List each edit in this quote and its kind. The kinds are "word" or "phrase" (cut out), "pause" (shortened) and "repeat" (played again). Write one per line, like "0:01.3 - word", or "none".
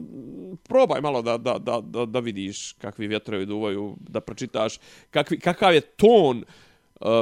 none